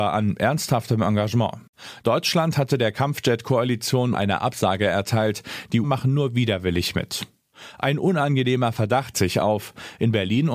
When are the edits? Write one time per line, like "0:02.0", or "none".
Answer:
0:04.1
0:05.8
0:09.1